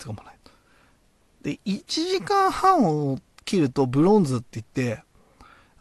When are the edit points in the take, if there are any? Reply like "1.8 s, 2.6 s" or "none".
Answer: none